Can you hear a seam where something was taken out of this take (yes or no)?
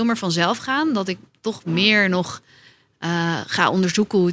no